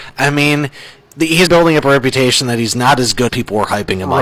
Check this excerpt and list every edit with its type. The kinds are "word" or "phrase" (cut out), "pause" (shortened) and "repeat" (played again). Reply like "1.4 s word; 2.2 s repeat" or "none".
1.5 s word; 3.3 s word